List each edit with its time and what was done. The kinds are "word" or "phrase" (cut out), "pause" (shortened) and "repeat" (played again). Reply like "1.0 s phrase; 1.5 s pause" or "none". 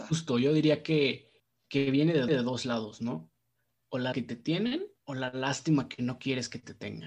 2.3 s repeat; 4.1 s word; 5.0 s pause